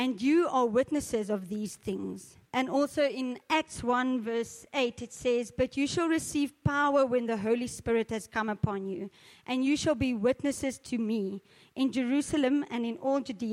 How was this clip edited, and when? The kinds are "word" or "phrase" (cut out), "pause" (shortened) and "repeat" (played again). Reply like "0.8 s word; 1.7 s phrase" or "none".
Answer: 2.5 s pause